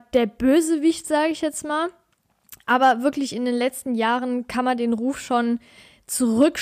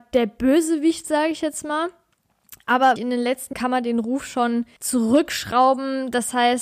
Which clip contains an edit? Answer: second; 3 cuts; at 3.0 s, 3.5 s, 4.8 s

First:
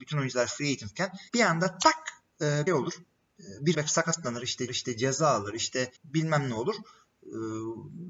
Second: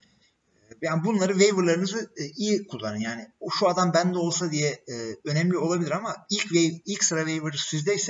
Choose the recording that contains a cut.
first; 5 cuts; at 1.3 s, 2.7 s, 3.7 s, 4.7 s, 5.9 s

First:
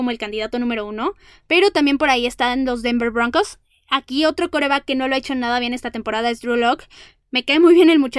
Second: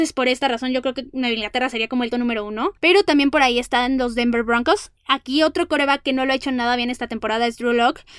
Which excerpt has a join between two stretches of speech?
second; 3 cuts; at 2.1 s, 2.8 s, 5.0 s

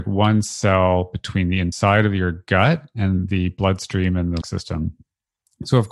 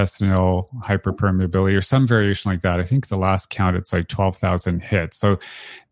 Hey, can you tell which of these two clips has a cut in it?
first; 1 cut; at 4.4 s

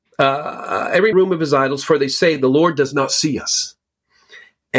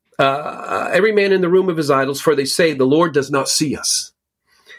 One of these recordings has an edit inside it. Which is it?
first; 1 cut; at 1.1 s

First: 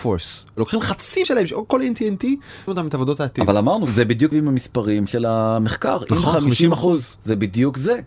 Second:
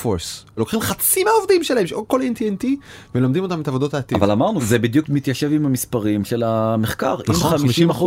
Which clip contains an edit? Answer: first; 3 cuts; at 1.2 s, 2.7 s, 4.3 s

